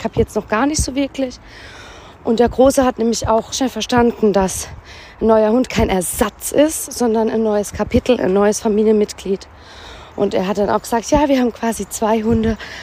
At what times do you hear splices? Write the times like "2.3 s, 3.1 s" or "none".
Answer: 3.5 s